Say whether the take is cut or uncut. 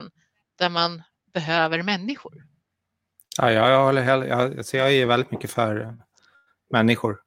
uncut